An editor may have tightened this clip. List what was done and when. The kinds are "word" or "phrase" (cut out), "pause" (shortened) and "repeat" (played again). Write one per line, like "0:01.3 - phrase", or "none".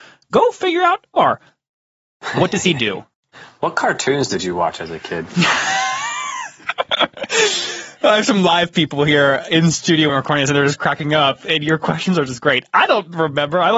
0:01.2 - phrase
0:03.1 - pause
0:10.1 - word